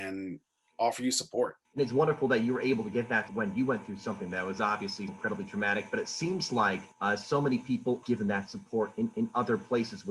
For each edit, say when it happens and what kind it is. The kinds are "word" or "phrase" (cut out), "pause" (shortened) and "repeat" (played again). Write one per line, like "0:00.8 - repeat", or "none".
0:01.6 - pause
0:03.3 - word
0:05.1 - word
0:06.9 - pause
0:08.0 - word
0:09.1 - repeat